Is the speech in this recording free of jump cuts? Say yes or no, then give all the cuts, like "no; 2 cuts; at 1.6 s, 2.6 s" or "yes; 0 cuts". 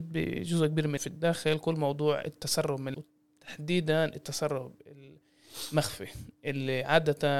no; 2 cuts; at 1.0 s, 2.9 s